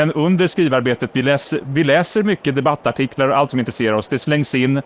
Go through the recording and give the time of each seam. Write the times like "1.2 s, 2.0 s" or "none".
3.5 s

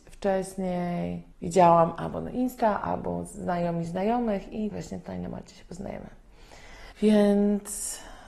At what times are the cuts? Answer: 1.3 s, 4.7 s, 6.9 s

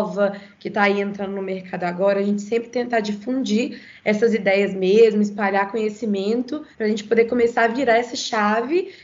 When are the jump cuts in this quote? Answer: 6.7 s

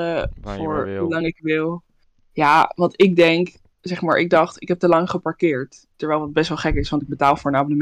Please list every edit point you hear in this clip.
none

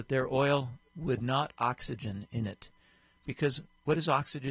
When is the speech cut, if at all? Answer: 1.5 s

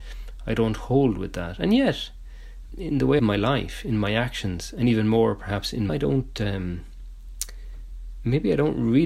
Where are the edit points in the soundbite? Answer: 2.7 s, 3.2 s, 5.9 s

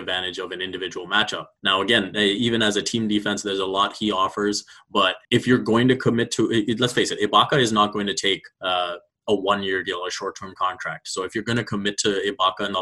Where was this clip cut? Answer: 1.6 s, 5.2 s, 8.5 s

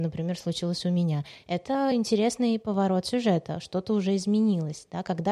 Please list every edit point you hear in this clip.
none

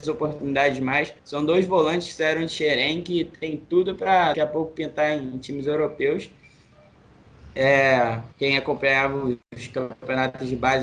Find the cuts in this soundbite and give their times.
1.2 s, 4.3 s, 8.3 s

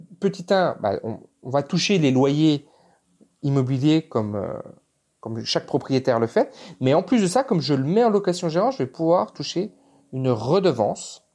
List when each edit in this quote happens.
none

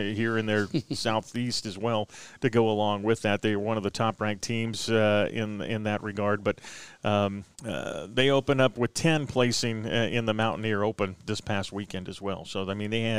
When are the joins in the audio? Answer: 7.5 s

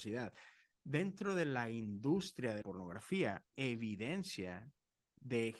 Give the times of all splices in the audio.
2.6 s, 3.5 s

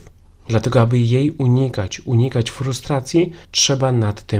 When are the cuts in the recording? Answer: 3.4 s

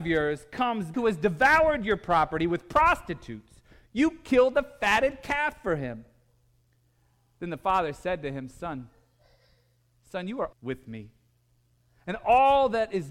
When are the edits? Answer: 0.9 s, 10.5 s

